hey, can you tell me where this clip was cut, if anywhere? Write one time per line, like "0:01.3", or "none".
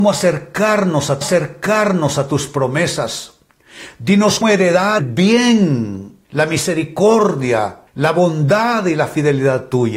0:01.2
0:04.4
0:05.0
0:06.2
0:07.9